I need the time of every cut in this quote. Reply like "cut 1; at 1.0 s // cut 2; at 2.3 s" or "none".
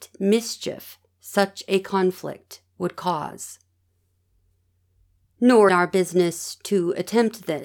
cut 1; at 5.7 s